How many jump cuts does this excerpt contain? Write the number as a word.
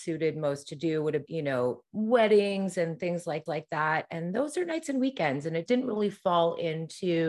three